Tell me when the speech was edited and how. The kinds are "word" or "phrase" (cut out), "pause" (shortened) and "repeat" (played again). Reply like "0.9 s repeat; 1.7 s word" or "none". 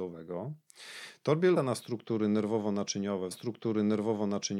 1.6 s word; 3.3 s repeat